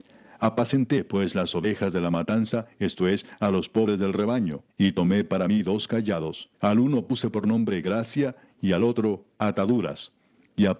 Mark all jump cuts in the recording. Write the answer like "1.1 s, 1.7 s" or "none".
4.7 s, 6.5 s